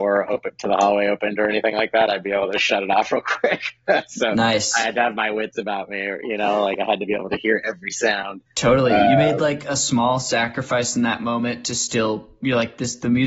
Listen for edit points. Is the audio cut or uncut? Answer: cut